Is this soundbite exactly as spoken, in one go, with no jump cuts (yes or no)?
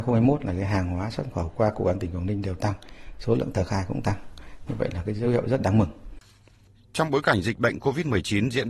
yes